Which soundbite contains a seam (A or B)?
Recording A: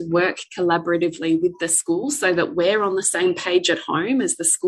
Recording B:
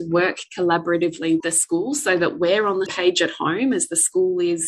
B